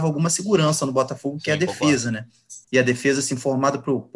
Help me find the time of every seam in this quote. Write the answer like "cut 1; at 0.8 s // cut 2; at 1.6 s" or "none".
cut 1; at 2.6 s